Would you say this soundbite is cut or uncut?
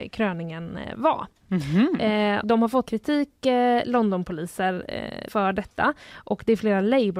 cut